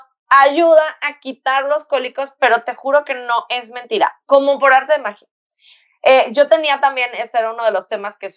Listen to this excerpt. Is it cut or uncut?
uncut